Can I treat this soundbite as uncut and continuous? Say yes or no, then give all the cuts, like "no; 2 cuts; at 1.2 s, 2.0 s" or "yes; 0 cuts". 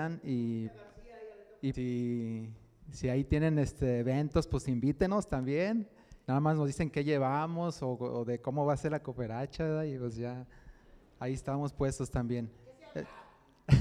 no; 2 cuts; at 1.7 s, 6.2 s